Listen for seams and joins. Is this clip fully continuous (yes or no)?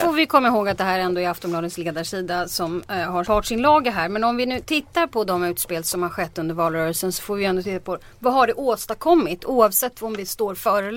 no